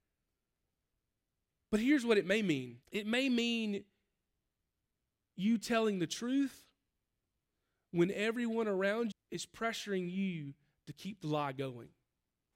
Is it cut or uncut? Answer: cut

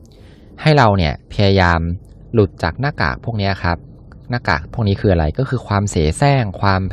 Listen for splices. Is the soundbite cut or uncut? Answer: cut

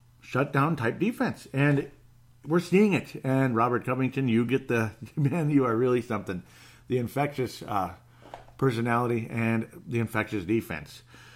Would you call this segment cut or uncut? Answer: uncut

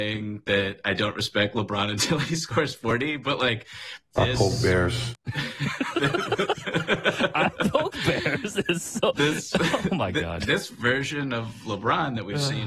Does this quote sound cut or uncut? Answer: cut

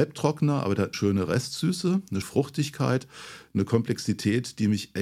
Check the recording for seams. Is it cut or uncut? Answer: cut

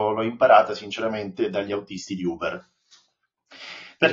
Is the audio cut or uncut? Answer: uncut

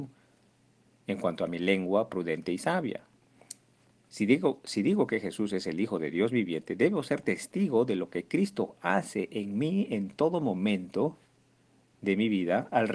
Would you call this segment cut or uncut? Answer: uncut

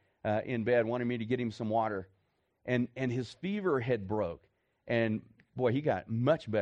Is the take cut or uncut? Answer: uncut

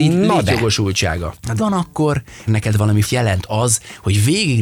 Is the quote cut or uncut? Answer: cut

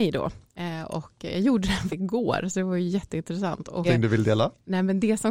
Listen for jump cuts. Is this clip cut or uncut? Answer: cut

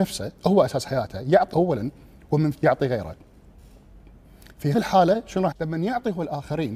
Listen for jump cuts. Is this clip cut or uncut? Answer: cut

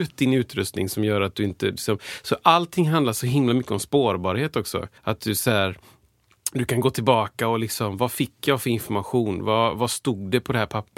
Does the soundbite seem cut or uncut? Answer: cut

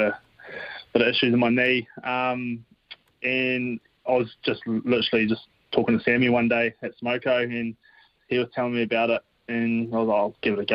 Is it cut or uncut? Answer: uncut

